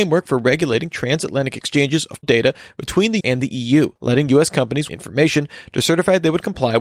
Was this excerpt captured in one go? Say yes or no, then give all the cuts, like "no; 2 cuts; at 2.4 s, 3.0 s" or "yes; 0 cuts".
no; 4 cuts; at 2.2 s, 3.2 s, 4.0 s, 4.9 s